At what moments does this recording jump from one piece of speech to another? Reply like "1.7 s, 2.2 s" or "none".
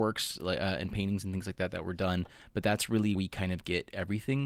3.2 s